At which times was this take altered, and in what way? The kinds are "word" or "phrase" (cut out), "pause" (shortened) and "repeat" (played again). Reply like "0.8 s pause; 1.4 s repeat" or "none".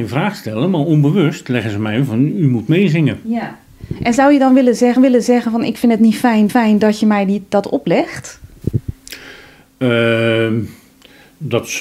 5.0 s repeat; 6.5 s repeat